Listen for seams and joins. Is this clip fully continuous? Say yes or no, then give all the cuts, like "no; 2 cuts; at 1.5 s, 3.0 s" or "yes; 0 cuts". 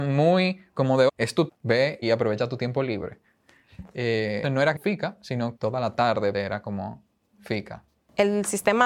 no; 7 cuts; at 1.1 s, 1.5 s, 2.0 s, 4.4 s, 4.7 s, 5.6 s, 6.3 s